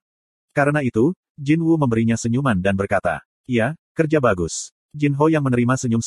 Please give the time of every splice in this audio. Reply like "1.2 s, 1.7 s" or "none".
4.8 s